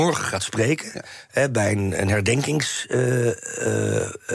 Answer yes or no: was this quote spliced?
no